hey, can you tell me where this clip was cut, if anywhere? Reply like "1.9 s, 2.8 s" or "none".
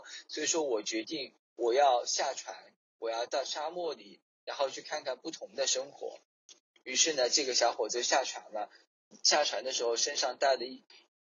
none